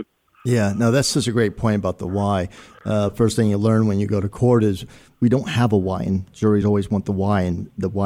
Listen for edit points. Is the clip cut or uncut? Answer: uncut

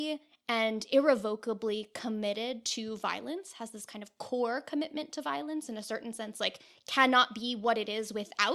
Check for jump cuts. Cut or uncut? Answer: uncut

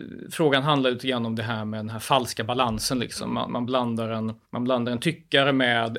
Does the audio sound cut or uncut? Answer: cut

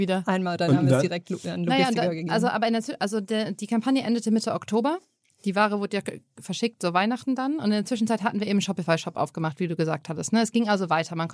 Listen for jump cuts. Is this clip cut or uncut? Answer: uncut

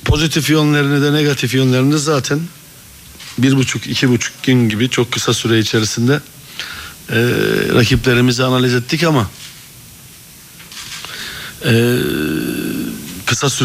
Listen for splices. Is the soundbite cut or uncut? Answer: uncut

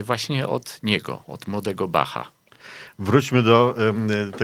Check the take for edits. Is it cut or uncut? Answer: uncut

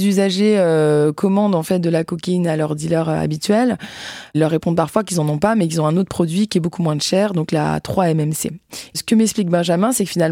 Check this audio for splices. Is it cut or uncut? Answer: uncut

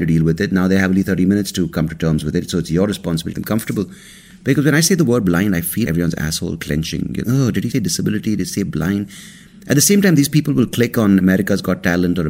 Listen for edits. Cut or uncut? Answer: cut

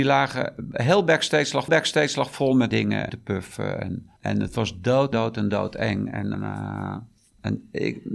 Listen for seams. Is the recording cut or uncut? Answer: cut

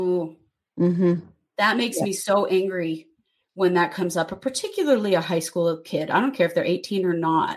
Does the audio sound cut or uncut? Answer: uncut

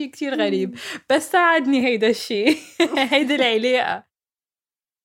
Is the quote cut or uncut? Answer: uncut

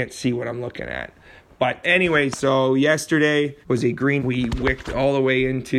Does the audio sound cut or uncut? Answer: cut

